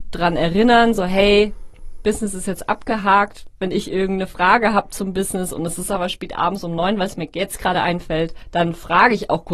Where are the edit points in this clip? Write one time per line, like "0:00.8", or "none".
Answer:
none

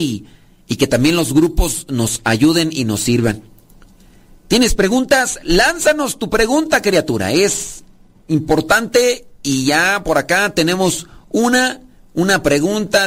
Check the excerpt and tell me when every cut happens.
none

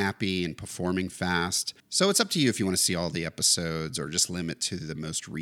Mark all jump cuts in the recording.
0:01.8

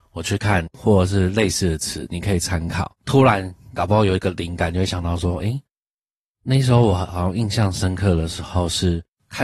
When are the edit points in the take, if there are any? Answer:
none

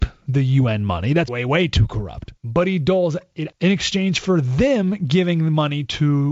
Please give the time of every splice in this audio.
0:01.3
0:02.4
0:03.5

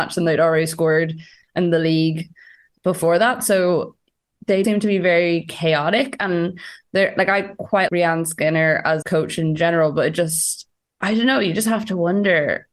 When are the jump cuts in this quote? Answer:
0:04.6
0:07.9
0:09.0

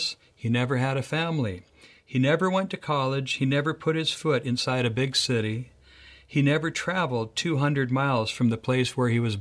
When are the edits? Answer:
none

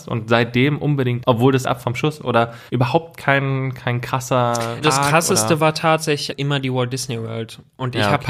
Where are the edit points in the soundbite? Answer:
0:01.2
0:01.6
0:02.2
0:02.7
0:04.8
0:06.3

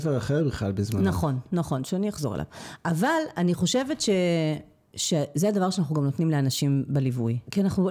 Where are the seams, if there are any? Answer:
none

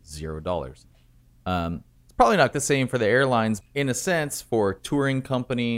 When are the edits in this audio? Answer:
0:02.0
0:02.5
0:03.6

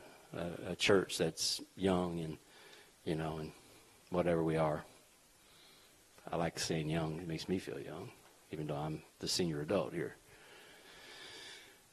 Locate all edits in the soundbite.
0:09.1

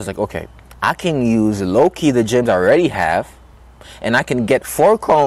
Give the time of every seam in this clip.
none

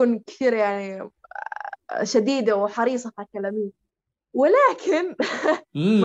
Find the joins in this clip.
none

